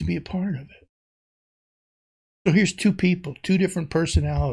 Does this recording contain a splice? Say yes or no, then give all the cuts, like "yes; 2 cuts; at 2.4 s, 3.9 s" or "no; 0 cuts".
no; 0 cuts